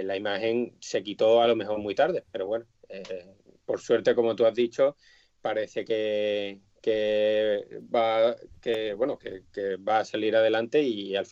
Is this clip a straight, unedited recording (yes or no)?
yes